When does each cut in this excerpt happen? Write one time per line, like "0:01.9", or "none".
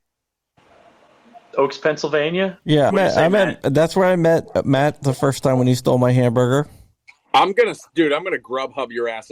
0:02.9